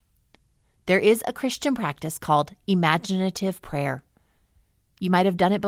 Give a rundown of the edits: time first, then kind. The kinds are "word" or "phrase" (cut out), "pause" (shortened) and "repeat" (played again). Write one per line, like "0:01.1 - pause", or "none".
none